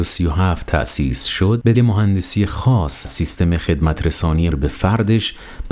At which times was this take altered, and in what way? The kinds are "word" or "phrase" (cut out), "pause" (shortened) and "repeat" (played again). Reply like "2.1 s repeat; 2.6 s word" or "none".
1.7 s word; 3.0 s word; 4.5 s word